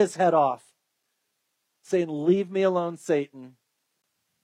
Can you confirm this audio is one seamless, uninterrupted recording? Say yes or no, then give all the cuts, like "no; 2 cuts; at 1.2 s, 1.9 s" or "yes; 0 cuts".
yes; 0 cuts